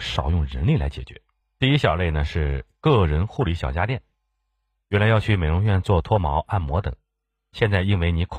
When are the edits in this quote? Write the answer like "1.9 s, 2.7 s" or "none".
none